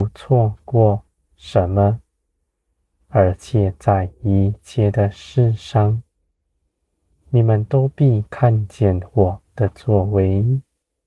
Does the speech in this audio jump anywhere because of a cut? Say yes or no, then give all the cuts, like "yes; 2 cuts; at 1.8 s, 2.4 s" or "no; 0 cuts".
no; 0 cuts